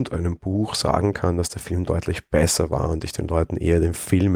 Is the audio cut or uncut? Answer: uncut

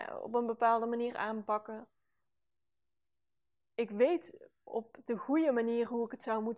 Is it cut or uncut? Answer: uncut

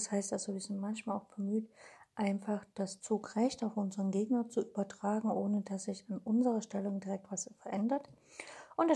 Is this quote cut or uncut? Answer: uncut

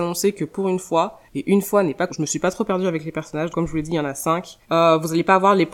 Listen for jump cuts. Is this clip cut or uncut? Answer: cut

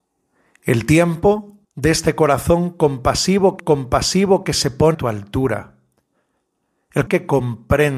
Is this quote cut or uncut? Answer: cut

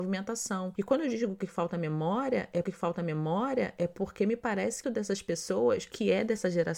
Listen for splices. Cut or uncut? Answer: cut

